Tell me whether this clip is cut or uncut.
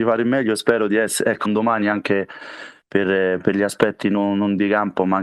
cut